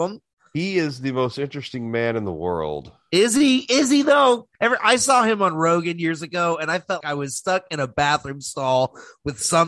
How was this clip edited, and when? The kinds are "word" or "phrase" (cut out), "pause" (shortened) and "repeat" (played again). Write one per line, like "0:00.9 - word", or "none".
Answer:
0:04.5 - pause
0:07.0 - word